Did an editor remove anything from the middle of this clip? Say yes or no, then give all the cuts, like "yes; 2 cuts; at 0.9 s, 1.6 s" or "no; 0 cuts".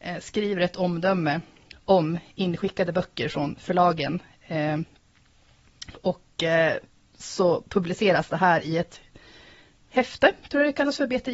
no; 0 cuts